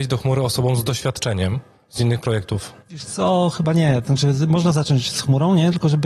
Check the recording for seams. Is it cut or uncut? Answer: uncut